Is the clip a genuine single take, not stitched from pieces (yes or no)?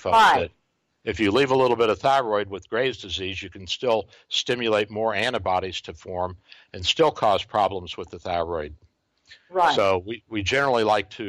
yes